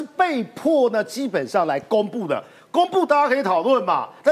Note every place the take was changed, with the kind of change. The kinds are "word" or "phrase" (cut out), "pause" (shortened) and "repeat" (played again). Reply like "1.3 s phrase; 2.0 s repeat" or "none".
none